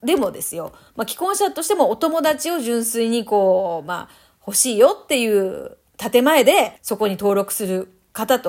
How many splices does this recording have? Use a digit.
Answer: 1